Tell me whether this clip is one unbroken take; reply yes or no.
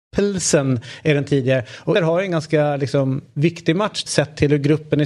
no